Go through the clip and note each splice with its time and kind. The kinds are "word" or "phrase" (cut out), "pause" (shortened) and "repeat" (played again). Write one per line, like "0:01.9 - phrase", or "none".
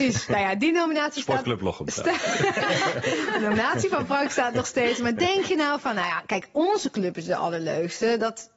none

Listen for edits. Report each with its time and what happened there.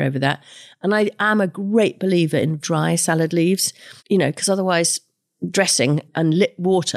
0:02.6 - word
0:04.0 - pause

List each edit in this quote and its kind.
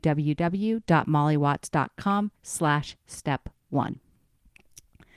0:02.4 - pause

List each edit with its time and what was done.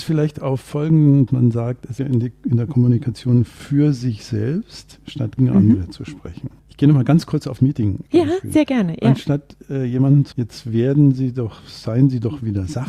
0:01.3 - phrase
0:02.0 - phrase
0:05.4 - word
0:06.6 - pause
0:07.6 - word
0:08.1 - pause
0:10.3 - word

